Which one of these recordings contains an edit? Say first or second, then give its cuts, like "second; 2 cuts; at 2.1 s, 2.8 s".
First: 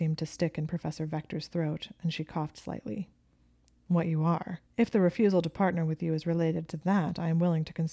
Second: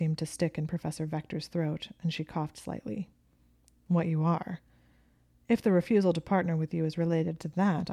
first; 1 cut; at 4.7 s